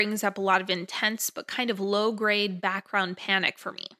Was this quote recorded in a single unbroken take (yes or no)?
yes